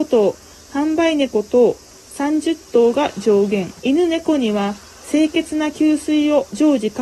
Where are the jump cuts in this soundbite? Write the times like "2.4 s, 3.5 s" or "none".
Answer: 3.8 s